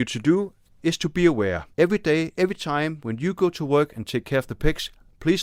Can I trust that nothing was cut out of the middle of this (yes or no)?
no